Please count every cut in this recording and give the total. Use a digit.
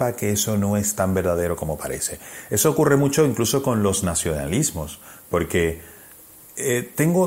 0